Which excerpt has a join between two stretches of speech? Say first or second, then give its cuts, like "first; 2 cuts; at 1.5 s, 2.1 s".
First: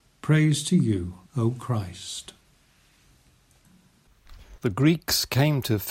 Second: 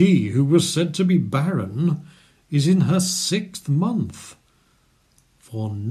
first; 2 cuts; at 1.3 s, 4.6 s